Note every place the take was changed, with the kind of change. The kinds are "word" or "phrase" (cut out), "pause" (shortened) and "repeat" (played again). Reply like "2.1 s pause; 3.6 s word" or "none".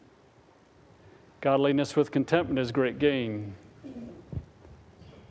none